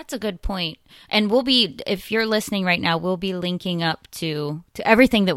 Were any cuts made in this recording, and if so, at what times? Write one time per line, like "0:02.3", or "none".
none